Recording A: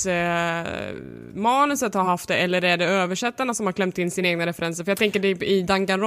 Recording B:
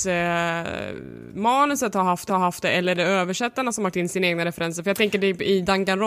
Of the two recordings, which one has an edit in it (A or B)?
B